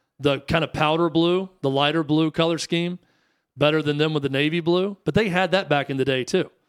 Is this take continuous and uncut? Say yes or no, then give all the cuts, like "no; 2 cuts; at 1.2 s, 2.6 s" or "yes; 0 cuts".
yes; 0 cuts